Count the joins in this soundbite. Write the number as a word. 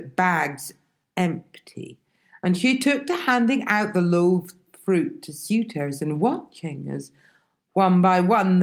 zero